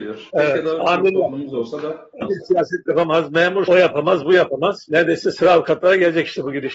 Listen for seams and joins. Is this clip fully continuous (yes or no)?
no